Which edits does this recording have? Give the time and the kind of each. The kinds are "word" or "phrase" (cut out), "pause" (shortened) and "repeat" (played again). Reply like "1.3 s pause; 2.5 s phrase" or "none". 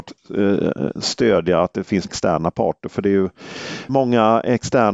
2.1 s word; 3.9 s word